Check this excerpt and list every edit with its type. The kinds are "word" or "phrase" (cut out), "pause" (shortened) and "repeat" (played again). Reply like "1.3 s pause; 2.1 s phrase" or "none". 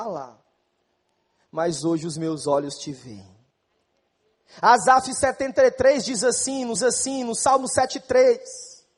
6.8 s repeat